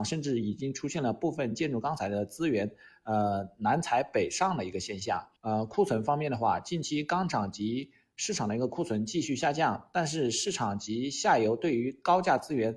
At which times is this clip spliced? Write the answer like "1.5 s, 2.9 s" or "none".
5.4 s